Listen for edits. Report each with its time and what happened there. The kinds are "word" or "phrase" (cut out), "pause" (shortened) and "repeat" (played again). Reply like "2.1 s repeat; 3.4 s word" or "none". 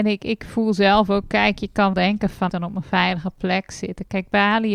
1.9 s word; 2.5 s phrase